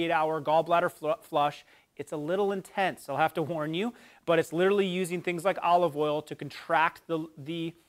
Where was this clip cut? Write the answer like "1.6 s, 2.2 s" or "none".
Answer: none